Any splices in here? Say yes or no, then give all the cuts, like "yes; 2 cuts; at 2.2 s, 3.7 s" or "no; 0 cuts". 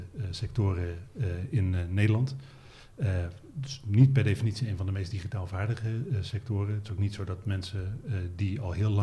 no; 0 cuts